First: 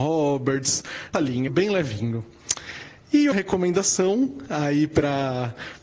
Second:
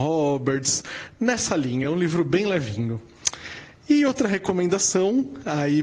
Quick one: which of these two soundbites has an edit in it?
first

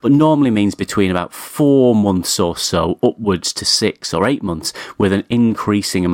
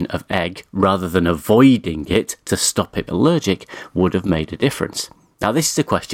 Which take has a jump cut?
second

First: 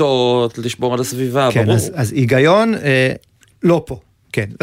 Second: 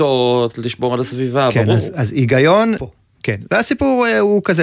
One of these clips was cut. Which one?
second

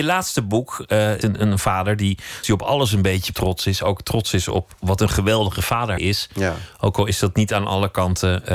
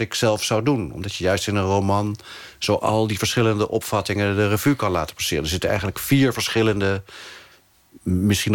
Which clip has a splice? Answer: first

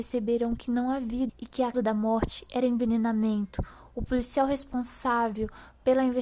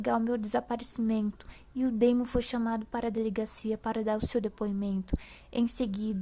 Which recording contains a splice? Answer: first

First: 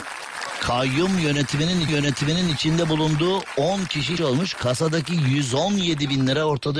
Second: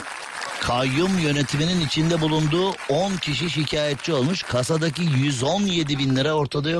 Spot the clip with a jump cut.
first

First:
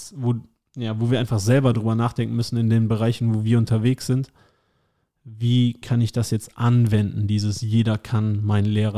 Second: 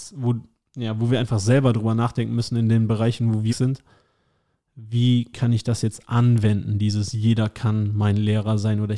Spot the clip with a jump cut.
second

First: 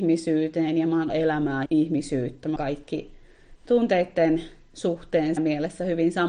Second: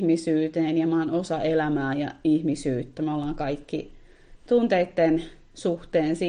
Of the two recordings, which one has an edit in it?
first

